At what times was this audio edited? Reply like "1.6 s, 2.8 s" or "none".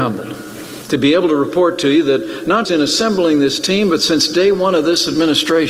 2.6 s